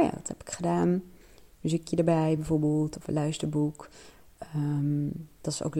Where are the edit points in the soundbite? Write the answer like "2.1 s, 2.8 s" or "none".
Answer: none